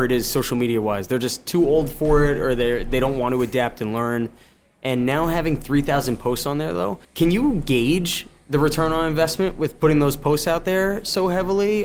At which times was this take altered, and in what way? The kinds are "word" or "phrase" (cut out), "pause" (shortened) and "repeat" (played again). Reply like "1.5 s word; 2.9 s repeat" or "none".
7.0 s pause